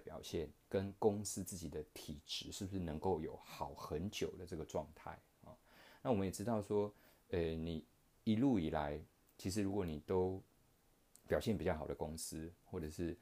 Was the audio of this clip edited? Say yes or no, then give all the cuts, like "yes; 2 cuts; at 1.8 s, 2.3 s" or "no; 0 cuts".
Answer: no; 0 cuts